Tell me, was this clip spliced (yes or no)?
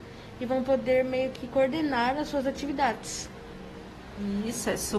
no